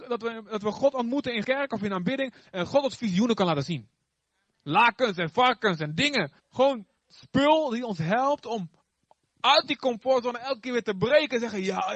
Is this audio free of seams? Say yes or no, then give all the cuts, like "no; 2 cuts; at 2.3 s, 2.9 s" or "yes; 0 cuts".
no; 2 cuts; at 1.4 s, 6.4 s